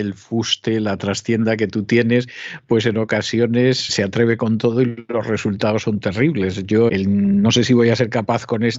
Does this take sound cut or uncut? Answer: cut